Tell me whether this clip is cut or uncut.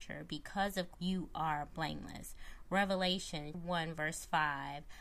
cut